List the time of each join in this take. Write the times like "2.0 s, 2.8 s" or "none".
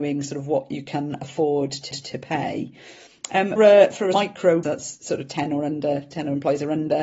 1.9 s, 3.6 s, 4.1 s, 4.6 s